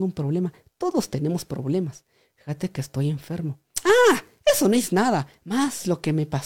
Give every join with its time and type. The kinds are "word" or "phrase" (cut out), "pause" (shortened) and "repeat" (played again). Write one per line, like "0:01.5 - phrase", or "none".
none

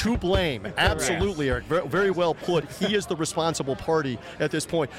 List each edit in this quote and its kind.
none

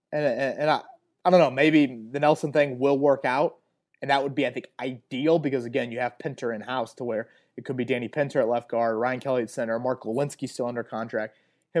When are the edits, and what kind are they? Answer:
none

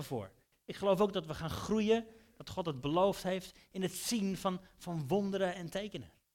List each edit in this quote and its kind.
none

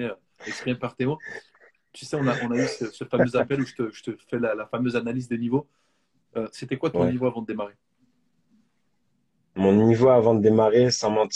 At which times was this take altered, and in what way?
none

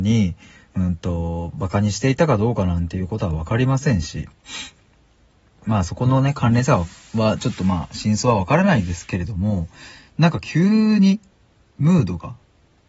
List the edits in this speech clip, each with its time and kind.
none

